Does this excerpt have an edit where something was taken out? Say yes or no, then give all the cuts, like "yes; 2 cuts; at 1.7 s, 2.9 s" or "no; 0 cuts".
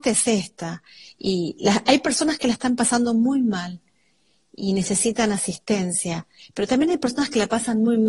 no; 0 cuts